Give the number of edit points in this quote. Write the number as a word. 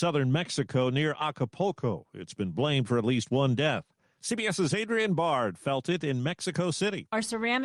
zero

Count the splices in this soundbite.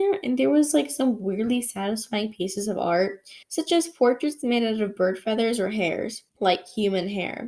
two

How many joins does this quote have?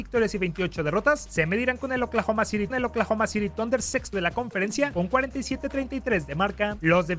two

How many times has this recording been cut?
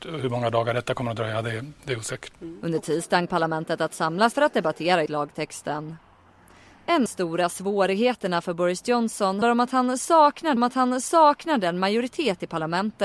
seven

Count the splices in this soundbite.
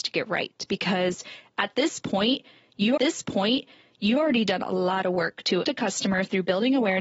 two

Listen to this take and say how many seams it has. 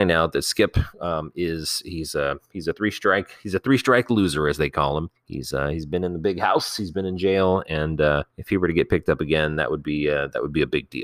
three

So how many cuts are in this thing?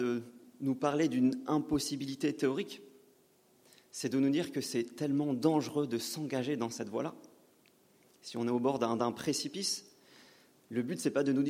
zero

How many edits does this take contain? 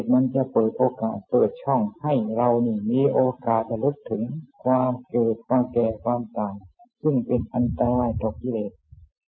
one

